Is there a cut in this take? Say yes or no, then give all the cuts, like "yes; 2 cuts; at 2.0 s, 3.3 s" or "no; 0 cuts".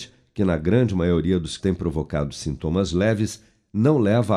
yes; 1 cut; at 1.6 s